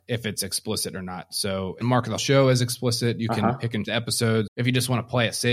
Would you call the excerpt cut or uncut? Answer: cut